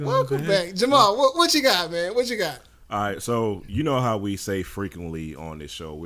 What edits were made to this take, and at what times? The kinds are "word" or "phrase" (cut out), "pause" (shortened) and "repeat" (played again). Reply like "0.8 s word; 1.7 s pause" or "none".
none